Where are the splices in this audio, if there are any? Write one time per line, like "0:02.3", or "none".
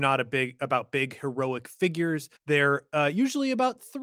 0:02.4